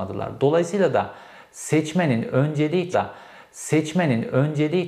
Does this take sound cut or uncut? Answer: cut